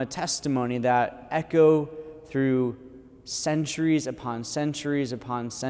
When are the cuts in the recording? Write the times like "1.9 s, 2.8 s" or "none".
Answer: none

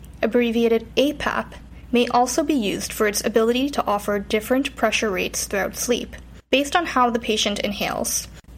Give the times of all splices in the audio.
6.4 s

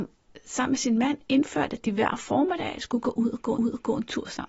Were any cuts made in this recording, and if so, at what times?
3.6 s

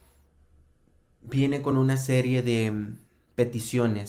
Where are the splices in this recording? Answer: none

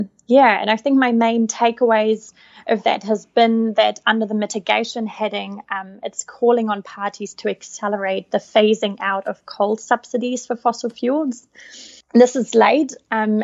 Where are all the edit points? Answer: none

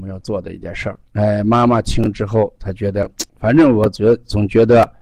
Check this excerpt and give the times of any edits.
1.1 s, 3.3 s

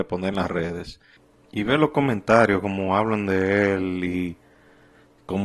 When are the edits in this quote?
none

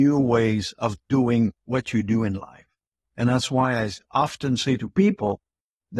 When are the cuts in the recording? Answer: none

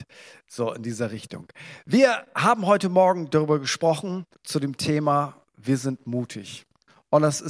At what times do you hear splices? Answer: 4.3 s, 5.5 s

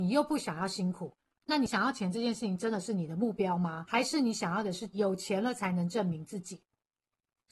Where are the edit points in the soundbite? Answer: none

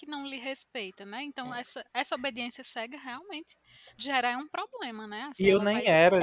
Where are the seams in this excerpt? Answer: 4.0 s

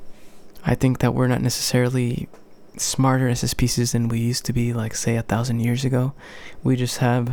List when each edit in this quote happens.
none

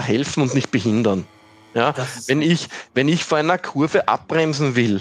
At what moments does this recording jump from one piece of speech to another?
none

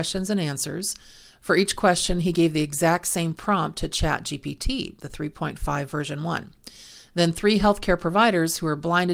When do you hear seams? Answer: none

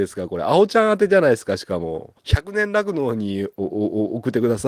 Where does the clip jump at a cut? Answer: 2.2 s

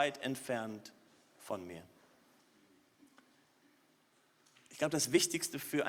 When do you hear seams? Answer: none

